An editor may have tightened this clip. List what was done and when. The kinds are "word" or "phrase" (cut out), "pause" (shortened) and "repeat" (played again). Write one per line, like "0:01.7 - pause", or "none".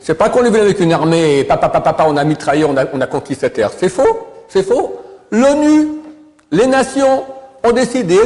none